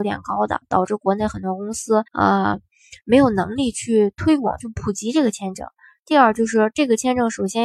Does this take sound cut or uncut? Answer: cut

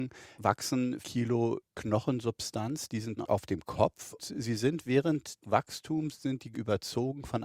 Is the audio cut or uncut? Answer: cut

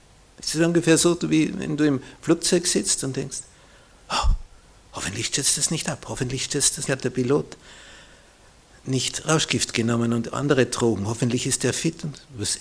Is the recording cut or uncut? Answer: cut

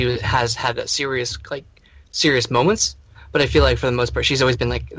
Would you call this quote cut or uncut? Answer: uncut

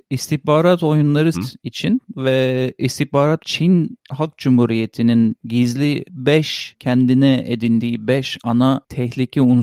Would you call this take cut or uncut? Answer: cut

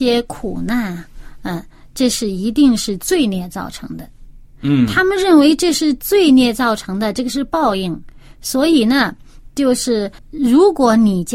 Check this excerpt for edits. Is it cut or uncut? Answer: cut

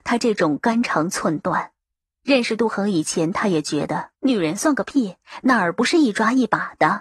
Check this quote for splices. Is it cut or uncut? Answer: cut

